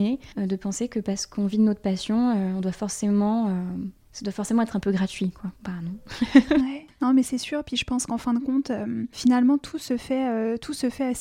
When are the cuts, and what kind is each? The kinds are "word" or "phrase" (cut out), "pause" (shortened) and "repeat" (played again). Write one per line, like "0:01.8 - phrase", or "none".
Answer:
0:05.6 - pause